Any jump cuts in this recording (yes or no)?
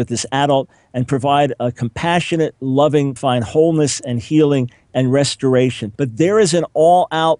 yes